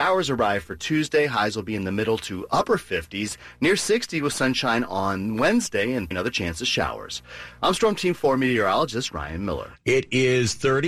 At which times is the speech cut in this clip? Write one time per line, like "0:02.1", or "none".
0:06.1